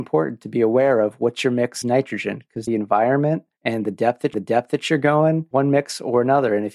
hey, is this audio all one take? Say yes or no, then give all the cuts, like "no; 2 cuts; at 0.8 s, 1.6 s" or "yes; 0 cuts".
no; 4 cuts; at 1.8 s, 2.7 s, 4.3 s, 5.5 s